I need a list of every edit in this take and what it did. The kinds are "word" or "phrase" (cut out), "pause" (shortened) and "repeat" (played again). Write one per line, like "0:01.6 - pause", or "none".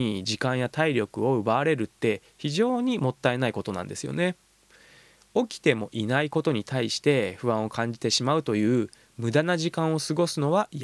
none

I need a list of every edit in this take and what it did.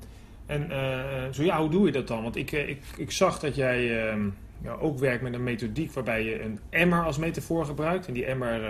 0:02.9 - word

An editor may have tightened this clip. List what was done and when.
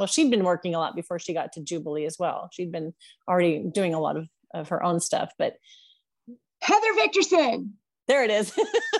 none

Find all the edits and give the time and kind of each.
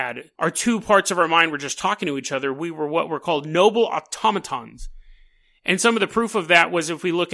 none

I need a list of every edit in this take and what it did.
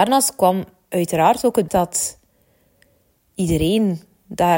0:01.7 - word

